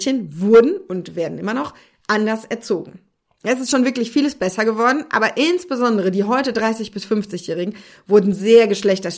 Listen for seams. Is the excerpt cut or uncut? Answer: uncut